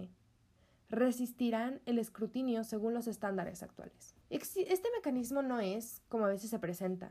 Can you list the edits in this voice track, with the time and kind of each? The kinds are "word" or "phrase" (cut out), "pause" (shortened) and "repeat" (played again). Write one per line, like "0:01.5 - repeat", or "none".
0:04.2 - pause